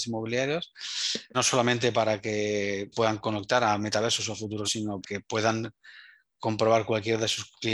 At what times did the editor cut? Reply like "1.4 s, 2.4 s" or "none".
1.3 s, 2.9 s, 4.6 s, 5.0 s